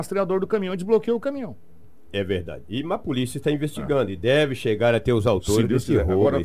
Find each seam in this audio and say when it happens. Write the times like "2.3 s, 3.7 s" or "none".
none